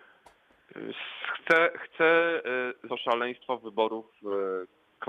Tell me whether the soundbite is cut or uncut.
cut